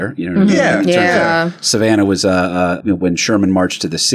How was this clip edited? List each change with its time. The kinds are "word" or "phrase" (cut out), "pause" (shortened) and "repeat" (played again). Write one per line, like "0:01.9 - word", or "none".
0:02.8 - word